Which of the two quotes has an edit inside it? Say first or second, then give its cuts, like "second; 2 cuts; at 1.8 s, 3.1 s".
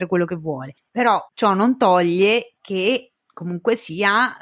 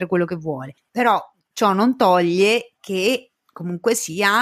first; 1 cut; at 1.3 s